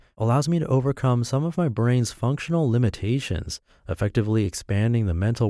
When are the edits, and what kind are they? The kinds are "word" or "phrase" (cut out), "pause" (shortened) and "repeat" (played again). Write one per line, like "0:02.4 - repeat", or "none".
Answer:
none